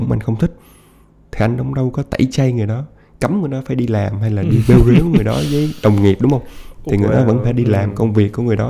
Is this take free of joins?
yes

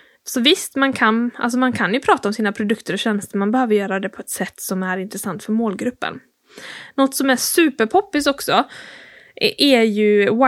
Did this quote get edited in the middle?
no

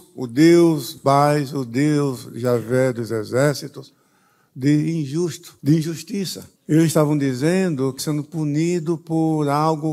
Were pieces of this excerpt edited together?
yes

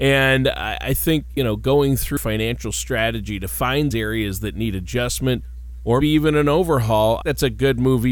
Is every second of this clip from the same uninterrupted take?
no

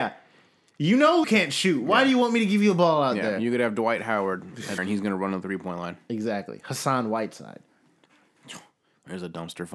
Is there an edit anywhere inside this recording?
yes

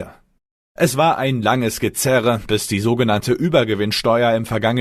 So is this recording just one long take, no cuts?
yes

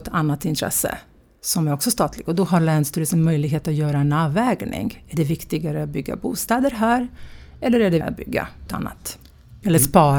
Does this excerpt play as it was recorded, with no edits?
no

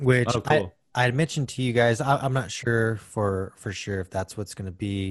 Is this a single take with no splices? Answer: yes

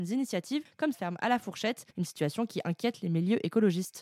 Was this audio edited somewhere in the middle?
yes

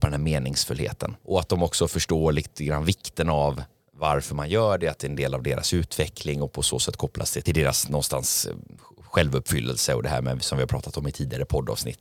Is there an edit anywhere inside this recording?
no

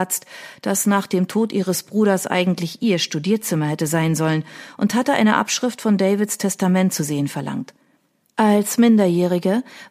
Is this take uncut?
yes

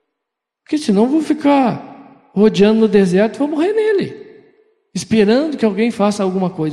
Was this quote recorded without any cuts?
yes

